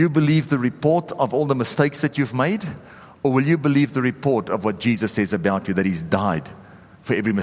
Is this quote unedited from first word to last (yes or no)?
yes